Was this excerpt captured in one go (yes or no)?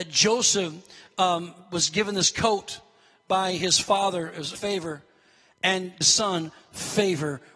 no